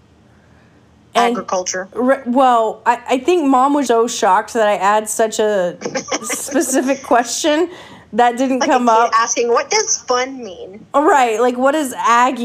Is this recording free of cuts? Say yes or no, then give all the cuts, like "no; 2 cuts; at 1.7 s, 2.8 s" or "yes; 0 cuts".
no; 1 cut; at 3.9 s